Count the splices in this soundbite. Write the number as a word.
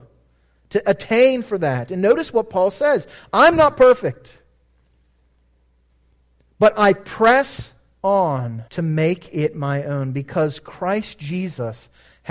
one